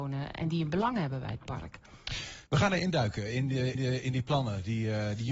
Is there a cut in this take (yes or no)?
yes